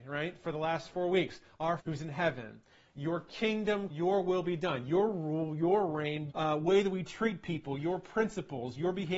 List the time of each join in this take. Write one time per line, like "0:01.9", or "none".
0:01.8
0:03.9
0:06.3